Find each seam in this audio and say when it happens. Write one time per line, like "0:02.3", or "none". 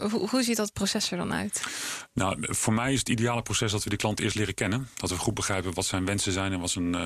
none